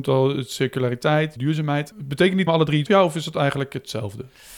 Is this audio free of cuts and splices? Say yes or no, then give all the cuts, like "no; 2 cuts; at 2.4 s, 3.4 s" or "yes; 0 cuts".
no; 3 cuts; at 1.4 s, 2.5 s, 2.9 s